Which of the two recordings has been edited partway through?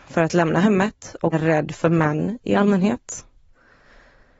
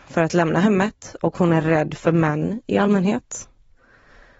first; 1 cut; at 1.3 s

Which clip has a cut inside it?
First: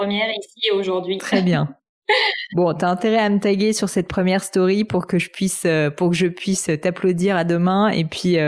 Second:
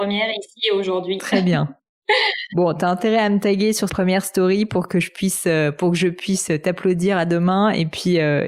second; 1 cut; at 3.9 s

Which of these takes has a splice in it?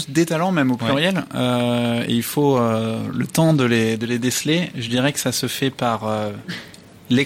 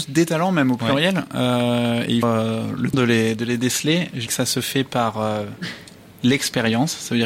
second; 3 cuts; at 2.2 s, 2.9 s, 4.3 s

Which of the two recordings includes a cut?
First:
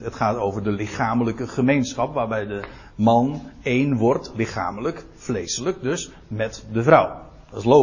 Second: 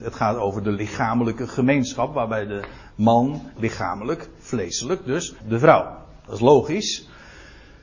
second; 2 cuts; at 3.6 s, 5.4 s

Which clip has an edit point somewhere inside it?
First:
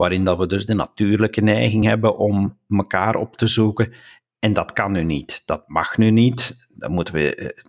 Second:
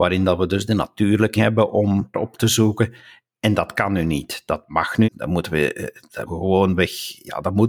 second; 4 cuts; at 1.4 s, 2.1 s, 5.0 s, 6.3 s

